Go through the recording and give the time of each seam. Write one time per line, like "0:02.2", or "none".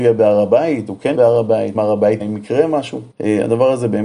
0:01.1
0:01.7
0:02.2
0:03.1

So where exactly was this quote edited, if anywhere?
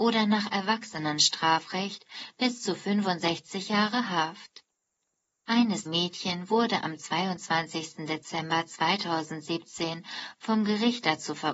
0:05.9

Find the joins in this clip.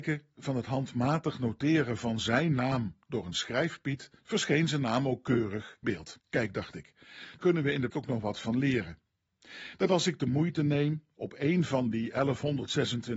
0:04.2
0:05.8
0:06.2
0:07.4
0:07.9

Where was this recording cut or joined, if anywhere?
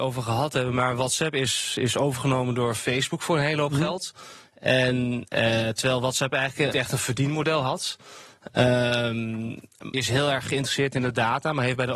0:06.7
0:09.9

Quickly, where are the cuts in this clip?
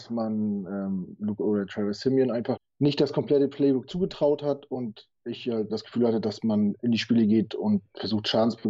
0:01.4
0:02.6
0:05.7

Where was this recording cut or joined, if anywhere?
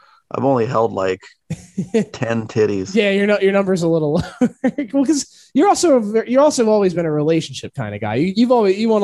none

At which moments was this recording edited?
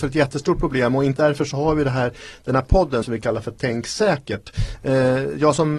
0:01.2
0:03.0

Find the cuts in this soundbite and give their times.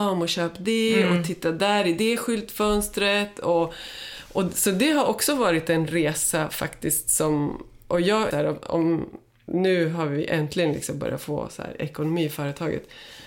0:08.3

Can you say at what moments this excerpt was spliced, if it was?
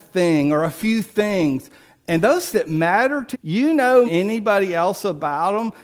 0:02.5
0:03.3
0:04.1

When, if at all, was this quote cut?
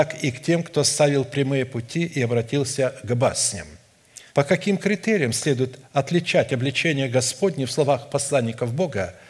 0:04.3
0:05.8

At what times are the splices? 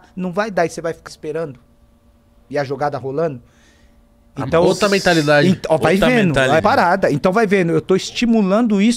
0:01.1
0:06.6

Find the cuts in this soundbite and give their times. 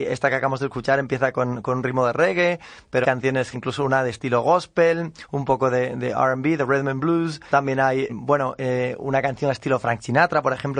0:03.0
0:03.5
0:07.5
0:08.1

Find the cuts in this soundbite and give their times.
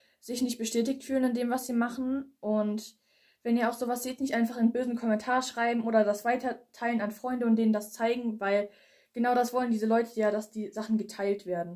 none

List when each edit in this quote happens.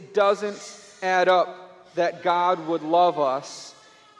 none

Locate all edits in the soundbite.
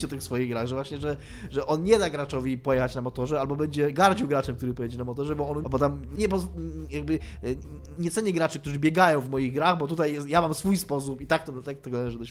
0:05.6
0:06.2
0:08.0

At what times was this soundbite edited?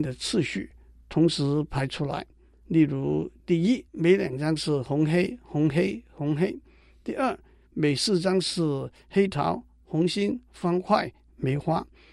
0:03.9

